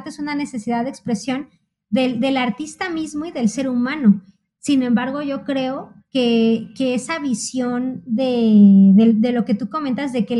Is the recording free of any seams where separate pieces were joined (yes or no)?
yes